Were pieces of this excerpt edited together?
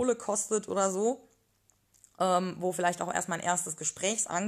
no; 0 cuts

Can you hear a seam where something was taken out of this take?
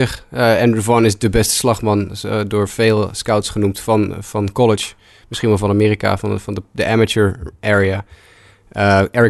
no; 0 cuts

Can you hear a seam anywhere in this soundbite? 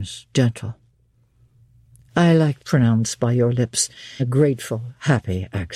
yes; 2 cuts; at 2.6 s, 4.2 s

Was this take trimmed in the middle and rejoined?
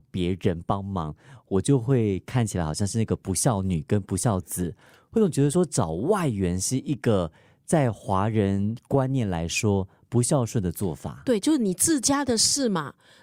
no; 0 cuts

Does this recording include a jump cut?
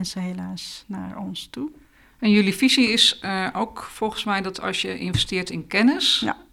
no; 0 cuts

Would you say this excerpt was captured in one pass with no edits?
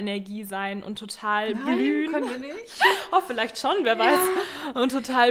yes; 0 cuts

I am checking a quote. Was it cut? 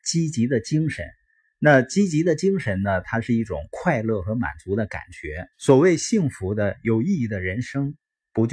yes; 1 cut; at 5.5 s

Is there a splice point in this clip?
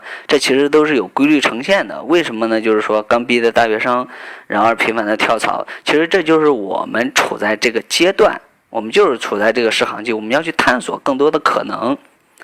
no; 0 cuts

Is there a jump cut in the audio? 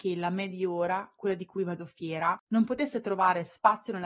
yes; 1 cut; at 2.4 s

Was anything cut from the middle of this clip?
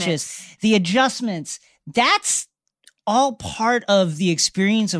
no; 0 cuts

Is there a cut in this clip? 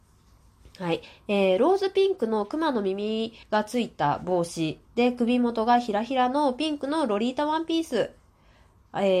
yes; 2 cuts; at 3.4 s, 4.8 s

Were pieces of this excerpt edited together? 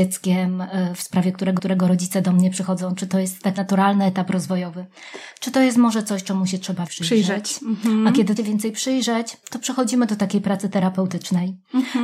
yes; 4 cuts; at 1.6 s, 3.6 s, 6.9 s, 8.4 s

